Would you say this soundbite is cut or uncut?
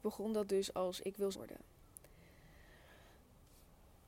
cut